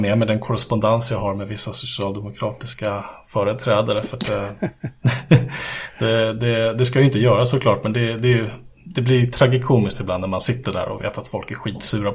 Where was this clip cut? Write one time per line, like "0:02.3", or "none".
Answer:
none